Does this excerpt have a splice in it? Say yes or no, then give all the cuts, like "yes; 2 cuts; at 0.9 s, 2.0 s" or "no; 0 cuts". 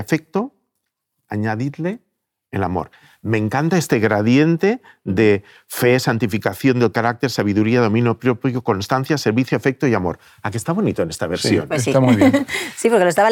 no; 0 cuts